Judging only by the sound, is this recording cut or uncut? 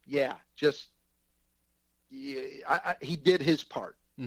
uncut